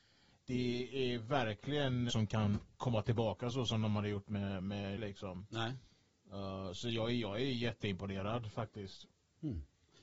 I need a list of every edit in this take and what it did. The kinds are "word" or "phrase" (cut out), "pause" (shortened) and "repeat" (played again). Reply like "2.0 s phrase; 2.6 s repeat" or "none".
2.1 s phrase; 5.0 s phrase